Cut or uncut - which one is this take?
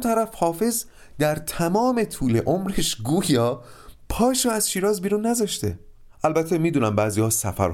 uncut